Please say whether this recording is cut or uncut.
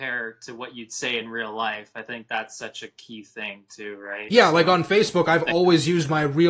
uncut